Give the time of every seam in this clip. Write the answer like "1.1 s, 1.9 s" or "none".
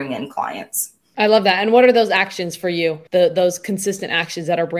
1.1 s, 3.1 s